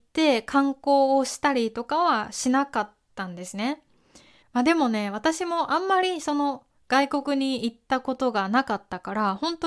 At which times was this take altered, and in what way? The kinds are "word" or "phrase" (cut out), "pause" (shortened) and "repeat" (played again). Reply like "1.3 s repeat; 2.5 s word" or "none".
none